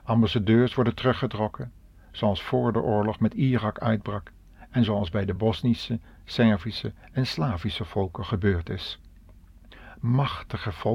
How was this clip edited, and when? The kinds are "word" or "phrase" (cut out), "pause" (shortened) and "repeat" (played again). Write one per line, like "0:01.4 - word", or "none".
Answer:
none